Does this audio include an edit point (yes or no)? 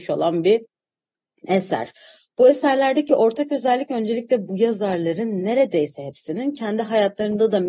no